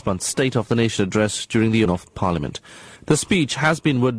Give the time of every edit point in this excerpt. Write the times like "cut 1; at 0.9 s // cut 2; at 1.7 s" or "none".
cut 1; at 1.9 s // cut 2; at 3.0 s